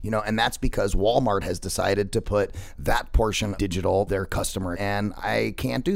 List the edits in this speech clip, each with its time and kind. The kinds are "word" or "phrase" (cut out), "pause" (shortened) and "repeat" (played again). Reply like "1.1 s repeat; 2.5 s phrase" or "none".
3.6 s word; 4.1 s word; 4.7 s word